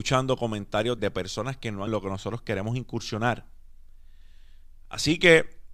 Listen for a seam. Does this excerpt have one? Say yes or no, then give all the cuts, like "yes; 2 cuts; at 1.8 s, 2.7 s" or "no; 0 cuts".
yes; 2 cuts; at 1.0 s, 1.9 s